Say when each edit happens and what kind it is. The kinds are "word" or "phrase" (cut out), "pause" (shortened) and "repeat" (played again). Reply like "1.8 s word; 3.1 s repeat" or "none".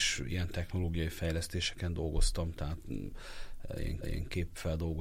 4.0 s repeat